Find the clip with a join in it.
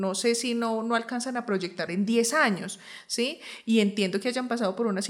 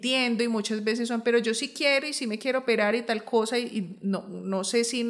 first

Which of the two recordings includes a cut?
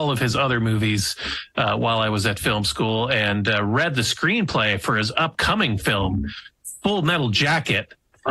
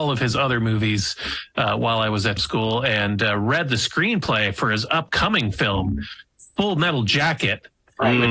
second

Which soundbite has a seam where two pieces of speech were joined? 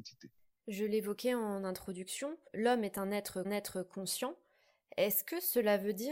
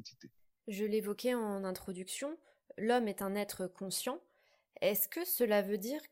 first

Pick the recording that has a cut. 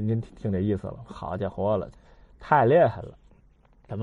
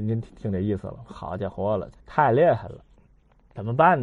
second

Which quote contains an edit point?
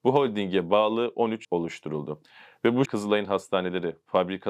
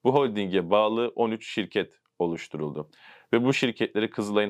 first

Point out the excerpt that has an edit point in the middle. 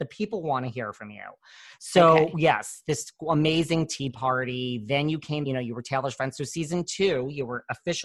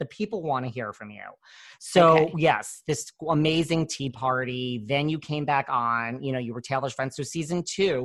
first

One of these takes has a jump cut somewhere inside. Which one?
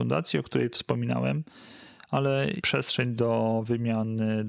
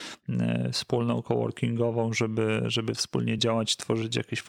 first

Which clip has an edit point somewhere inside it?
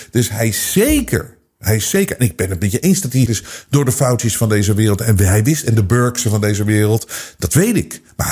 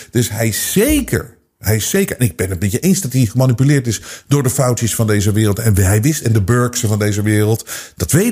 first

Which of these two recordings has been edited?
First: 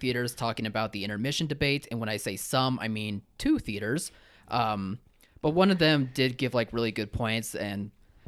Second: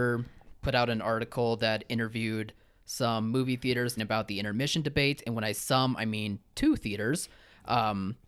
second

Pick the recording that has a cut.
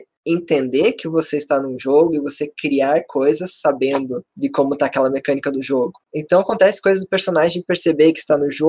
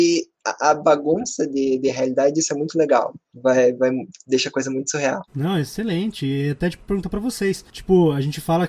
second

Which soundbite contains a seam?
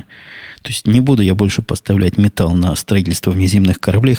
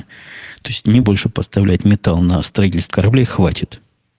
second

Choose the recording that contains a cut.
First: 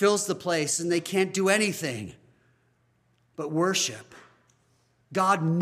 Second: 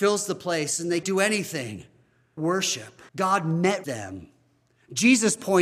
second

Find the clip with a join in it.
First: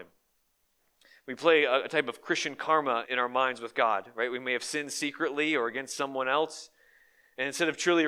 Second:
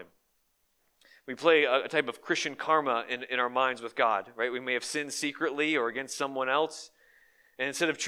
first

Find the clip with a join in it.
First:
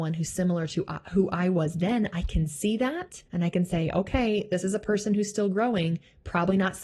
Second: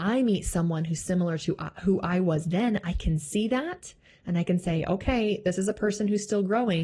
first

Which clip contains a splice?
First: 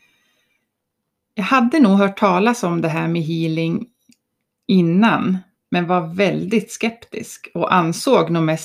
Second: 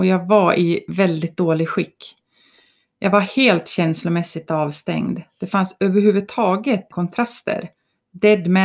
second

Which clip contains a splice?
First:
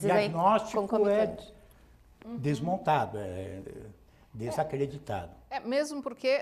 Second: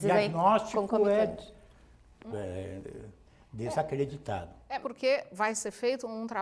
second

